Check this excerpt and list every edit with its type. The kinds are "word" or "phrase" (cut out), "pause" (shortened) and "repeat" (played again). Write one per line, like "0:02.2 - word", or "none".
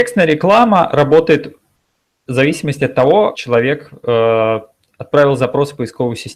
0:03.3 - word